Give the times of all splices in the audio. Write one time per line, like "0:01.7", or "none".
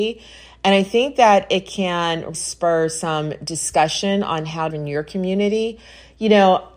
0:02.3
0:04.7